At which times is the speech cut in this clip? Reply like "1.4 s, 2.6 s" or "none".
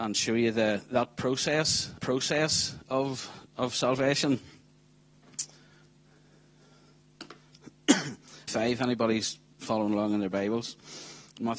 2.0 s, 8.5 s